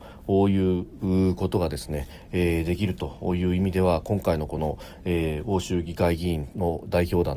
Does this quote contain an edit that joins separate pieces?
no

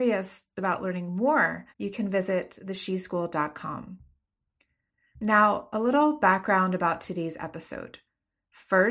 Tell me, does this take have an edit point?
yes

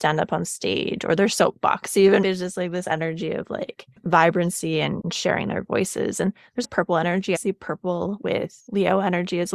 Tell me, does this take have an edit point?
yes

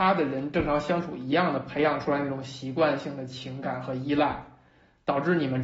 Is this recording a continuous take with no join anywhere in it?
yes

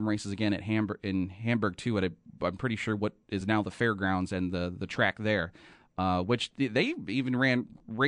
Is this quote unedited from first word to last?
yes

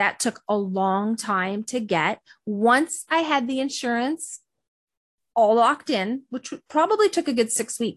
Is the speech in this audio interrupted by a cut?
no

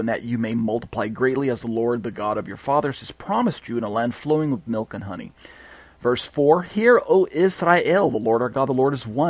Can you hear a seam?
no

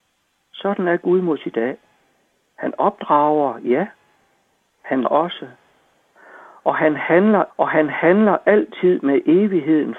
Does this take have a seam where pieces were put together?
yes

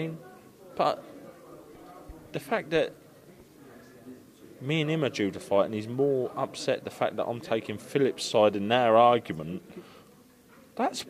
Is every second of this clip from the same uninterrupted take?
yes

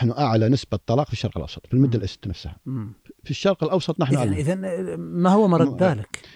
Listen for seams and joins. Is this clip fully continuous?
yes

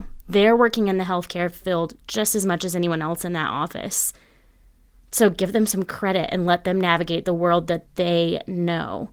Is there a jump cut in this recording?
no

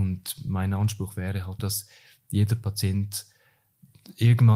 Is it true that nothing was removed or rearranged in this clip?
no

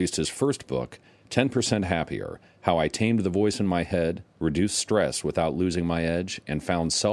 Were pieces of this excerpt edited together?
no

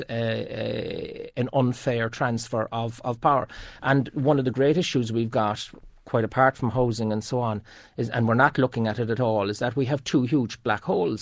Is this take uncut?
yes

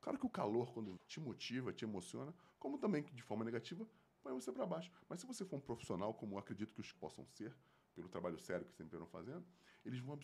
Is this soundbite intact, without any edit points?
no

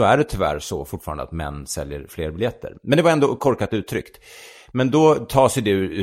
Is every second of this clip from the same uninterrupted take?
yes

